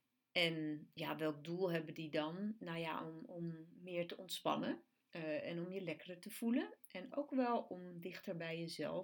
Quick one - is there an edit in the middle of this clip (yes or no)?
yes